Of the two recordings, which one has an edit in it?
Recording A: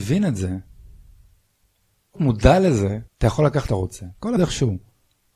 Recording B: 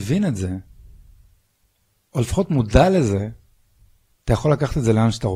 A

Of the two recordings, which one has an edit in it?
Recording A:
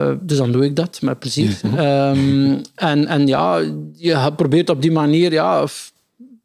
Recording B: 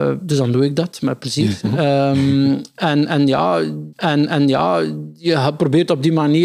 B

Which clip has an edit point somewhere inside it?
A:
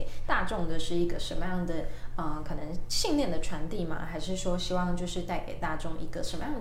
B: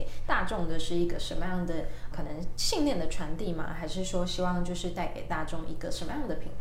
B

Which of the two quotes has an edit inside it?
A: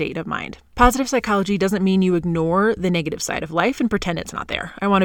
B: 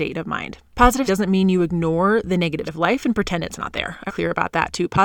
B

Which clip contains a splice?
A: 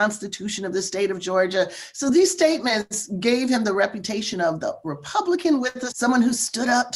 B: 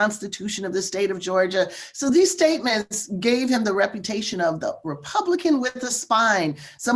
A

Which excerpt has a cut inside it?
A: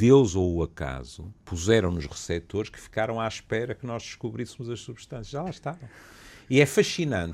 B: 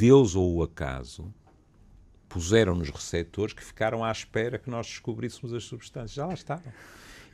A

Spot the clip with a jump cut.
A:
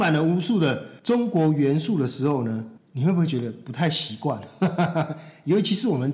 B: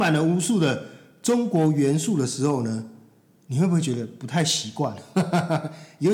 A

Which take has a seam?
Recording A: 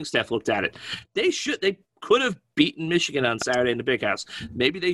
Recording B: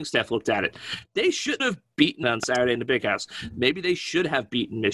B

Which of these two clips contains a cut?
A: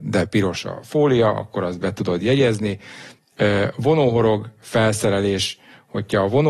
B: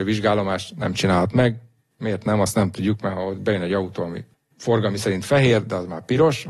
B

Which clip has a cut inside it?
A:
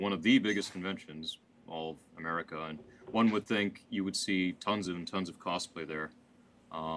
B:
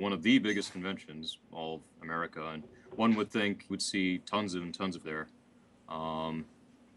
B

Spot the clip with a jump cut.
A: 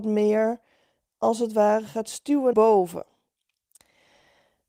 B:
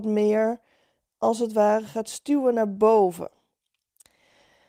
A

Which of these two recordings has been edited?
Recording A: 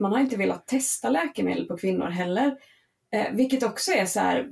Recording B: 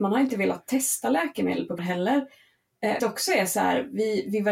B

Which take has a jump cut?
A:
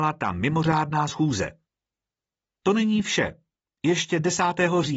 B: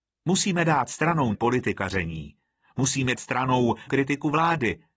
B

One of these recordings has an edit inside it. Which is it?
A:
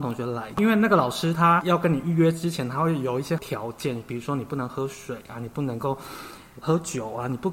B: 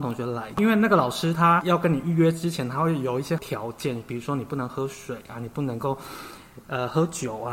A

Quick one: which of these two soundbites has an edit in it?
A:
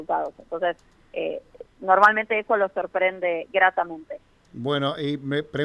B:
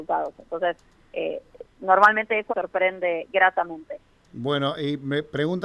B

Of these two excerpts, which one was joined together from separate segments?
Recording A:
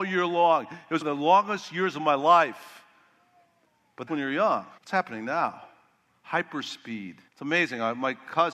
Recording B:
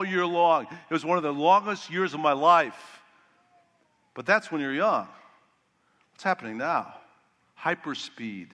A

